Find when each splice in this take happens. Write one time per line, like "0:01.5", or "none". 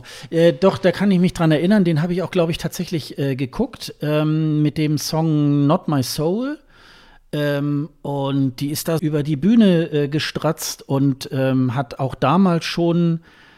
0:09.0